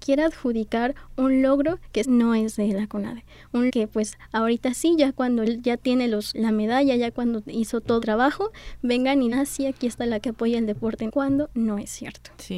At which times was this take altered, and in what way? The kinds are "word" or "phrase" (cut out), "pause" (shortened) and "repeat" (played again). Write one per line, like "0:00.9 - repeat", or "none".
0:02.0 - word
0:03.7 - word
0:05.5 - word
0:06.3 - word
0:08.0 - word
0:09.3 - word
0:10.2 - word
0:11.1 - word